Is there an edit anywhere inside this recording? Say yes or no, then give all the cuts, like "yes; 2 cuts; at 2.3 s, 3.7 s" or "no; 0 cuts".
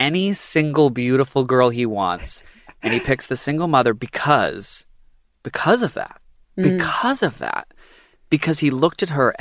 no; 0 cuts